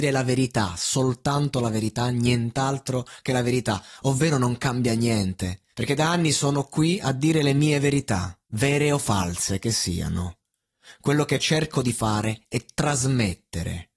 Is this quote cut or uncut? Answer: cut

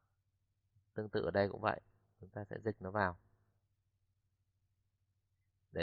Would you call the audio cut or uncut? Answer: uncut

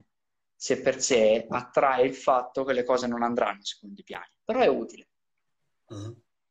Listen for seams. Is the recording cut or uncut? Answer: uncut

